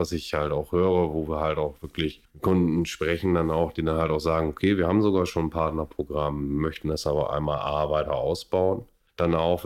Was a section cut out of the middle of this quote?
no; 0 cuts

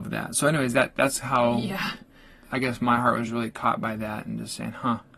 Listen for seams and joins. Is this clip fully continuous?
yes; 0 cuts

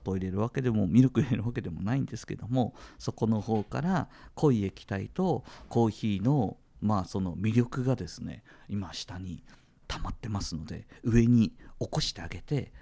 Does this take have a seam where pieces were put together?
no; 0 cuts

